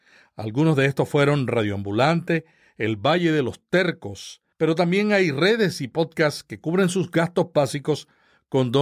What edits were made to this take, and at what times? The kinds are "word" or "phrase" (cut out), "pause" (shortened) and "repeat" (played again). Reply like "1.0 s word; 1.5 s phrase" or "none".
4.5 s pause

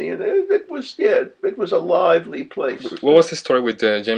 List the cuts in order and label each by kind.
none

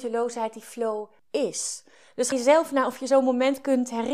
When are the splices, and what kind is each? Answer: 1.2 s pause; 2.3 s phrase

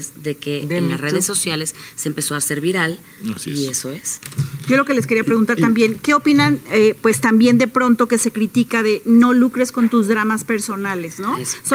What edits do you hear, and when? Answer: none

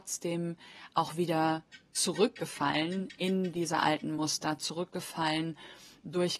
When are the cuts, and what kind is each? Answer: none

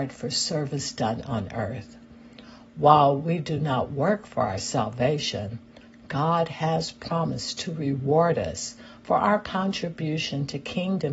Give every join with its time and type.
none

